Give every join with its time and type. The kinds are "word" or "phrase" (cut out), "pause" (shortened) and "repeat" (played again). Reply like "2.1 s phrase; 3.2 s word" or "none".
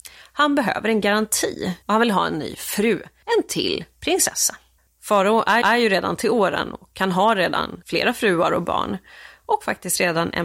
1.8 s pause; 4.8 s pause; 5.6 s repeat